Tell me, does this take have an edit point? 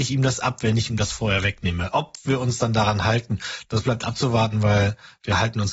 no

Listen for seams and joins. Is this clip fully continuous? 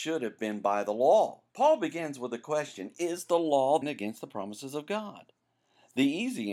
no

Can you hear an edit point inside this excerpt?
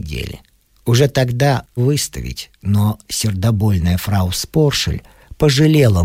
yes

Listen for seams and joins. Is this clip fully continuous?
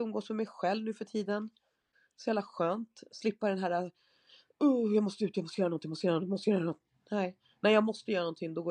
yes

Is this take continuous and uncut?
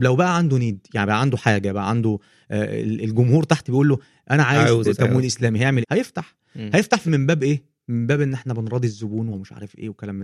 no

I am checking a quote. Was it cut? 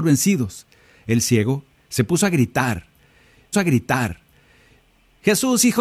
yes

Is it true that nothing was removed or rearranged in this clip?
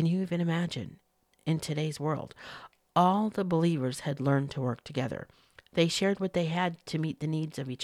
yes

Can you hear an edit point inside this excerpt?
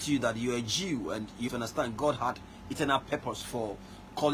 yes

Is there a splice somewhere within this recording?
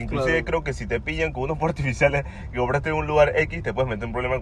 no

